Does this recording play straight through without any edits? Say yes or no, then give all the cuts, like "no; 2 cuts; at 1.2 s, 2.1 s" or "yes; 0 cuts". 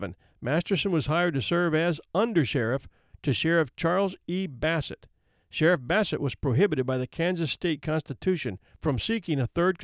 yes; 0 cuts